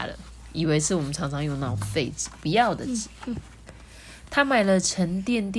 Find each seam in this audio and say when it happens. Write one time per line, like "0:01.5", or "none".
none